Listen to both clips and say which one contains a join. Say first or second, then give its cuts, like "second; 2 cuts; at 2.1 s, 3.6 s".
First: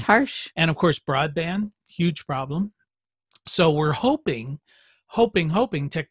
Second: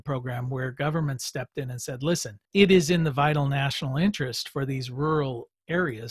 second; 1 cut; at 2.4 s